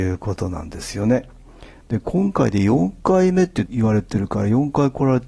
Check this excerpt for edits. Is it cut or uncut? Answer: uncut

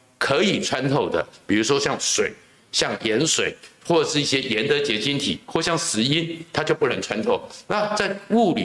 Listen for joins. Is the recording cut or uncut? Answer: uncut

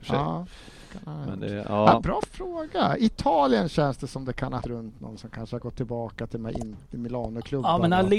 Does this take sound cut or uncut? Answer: cut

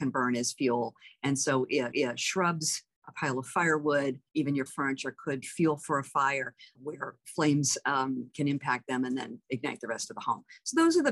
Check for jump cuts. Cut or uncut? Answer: cut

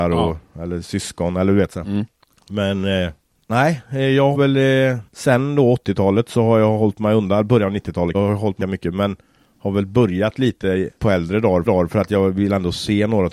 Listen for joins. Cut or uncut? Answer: cut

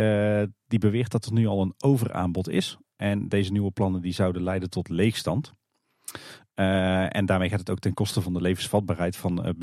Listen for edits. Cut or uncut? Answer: uncut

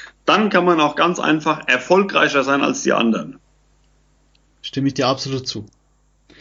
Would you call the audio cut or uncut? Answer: uncut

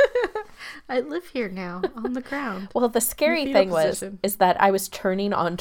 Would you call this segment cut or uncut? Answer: uncut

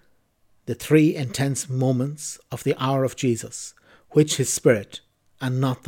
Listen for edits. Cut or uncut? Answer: uncut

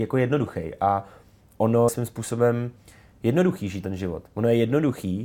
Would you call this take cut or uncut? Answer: cut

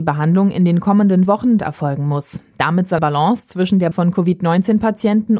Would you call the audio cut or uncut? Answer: cut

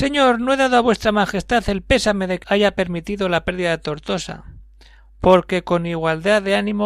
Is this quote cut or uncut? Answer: cut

